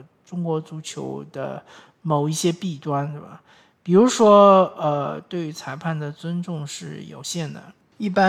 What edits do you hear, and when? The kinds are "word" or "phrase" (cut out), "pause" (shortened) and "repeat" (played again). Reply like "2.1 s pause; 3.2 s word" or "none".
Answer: none